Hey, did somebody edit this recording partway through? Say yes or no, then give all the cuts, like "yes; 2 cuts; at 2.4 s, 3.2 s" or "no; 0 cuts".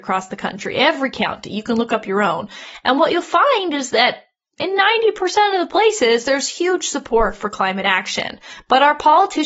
no; 0 cuts